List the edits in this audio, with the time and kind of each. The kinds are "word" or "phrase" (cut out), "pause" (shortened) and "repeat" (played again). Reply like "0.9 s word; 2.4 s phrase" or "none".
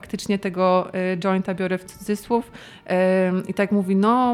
none